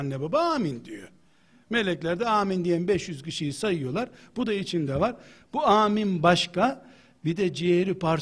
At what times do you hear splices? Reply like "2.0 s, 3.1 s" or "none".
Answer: none

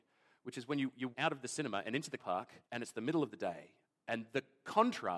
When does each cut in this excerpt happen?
1.1 s, 2.2 s, 2.6 s, 3.8 s

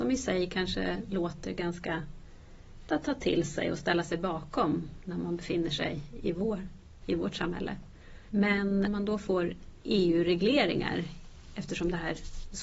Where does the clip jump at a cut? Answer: 2.9 s, 7.0 s, 8.9 s

